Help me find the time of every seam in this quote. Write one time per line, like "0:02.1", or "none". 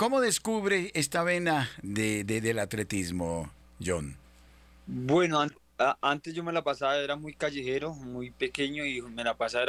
none